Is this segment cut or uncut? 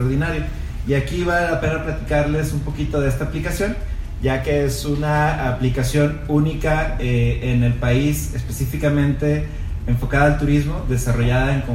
uncut